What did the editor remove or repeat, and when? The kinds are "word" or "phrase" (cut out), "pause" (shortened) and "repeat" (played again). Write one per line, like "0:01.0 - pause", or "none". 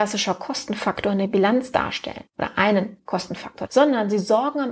0:02.3 - pause
0:03.7 - word